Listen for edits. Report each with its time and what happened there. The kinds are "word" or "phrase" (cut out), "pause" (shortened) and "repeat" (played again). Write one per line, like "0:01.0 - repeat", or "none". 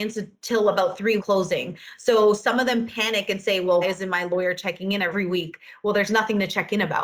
0:01.2 - phrase
0:03.8 - word